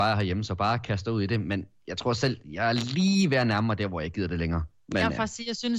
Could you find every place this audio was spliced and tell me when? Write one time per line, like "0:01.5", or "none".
none